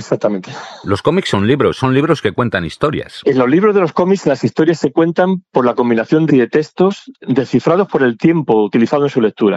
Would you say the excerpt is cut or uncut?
cut